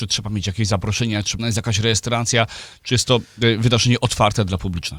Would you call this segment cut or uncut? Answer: cut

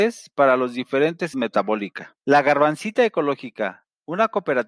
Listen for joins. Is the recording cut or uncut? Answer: cut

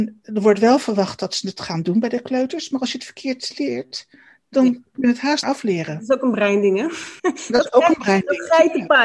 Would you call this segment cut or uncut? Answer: cut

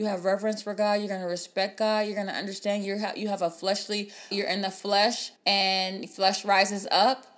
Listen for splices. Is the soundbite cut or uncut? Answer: cut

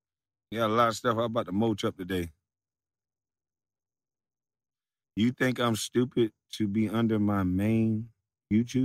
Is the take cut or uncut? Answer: uncut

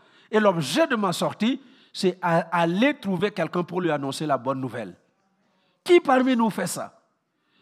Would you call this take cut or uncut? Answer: uncut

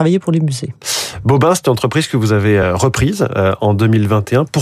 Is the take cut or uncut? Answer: uncut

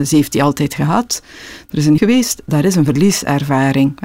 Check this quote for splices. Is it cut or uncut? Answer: cut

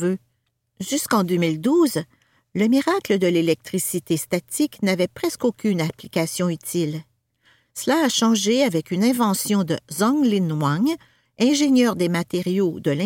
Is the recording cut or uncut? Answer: uncut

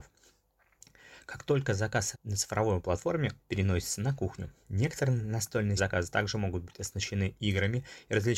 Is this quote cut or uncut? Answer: cut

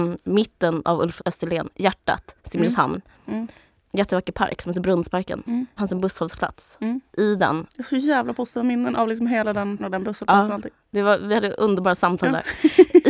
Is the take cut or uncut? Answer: cut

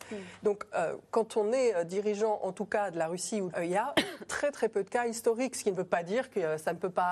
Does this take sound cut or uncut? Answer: cut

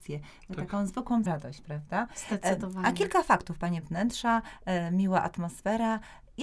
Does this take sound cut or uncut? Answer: cut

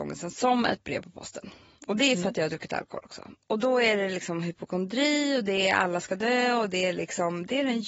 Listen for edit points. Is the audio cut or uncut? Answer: uncut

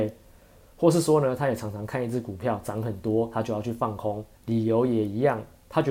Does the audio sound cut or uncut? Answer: cut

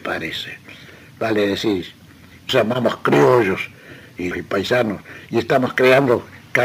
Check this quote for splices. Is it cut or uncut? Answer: cut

